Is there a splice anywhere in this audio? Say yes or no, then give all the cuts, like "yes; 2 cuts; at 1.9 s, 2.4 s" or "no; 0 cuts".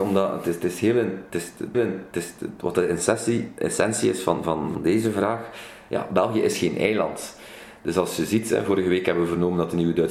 yes; 2 cuts; at 1.7 s, 4.7 s